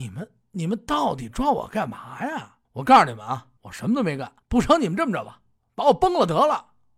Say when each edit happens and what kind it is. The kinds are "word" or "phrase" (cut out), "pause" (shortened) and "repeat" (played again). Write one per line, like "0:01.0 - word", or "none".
0:02.6 - pause
0:03.6 - pause
0:04.4 - pause
0:05.6 - pause